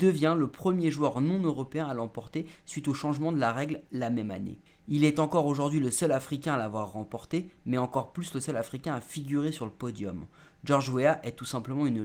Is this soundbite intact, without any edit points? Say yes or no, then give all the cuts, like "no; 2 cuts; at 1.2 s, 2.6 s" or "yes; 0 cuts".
yes; 0 cuts